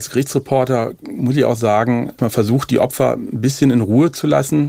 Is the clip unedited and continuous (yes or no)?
no